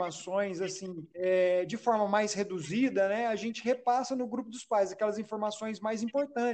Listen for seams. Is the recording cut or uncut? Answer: cut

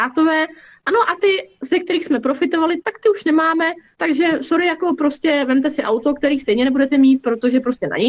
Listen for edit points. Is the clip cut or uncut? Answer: uncut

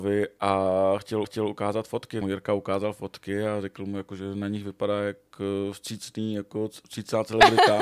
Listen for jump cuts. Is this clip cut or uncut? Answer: cut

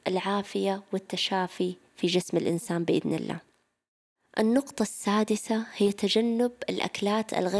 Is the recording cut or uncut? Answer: uncut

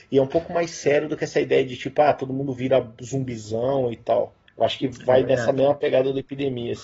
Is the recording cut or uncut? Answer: cut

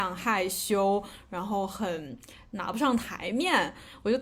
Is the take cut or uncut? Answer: uncut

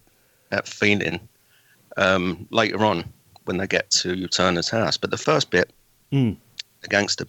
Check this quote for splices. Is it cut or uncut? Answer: uncut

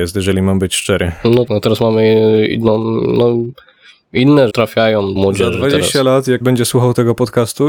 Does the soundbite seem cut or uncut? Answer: cut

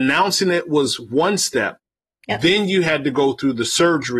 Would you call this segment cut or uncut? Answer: uncut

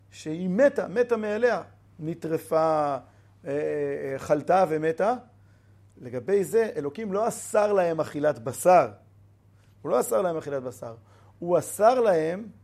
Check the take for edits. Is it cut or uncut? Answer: uncut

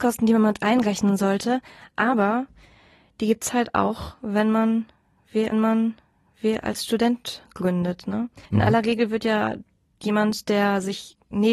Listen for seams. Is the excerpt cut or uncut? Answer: cut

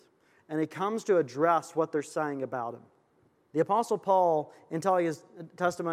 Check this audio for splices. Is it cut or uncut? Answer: uncut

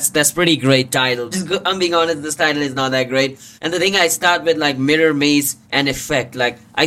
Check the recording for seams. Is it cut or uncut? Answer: cut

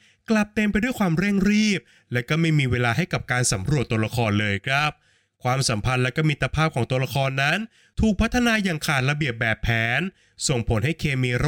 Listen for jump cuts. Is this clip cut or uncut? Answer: uncut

